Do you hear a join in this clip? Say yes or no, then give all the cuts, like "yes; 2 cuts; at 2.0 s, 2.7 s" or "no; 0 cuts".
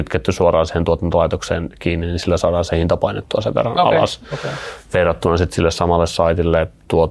no; 0 cuts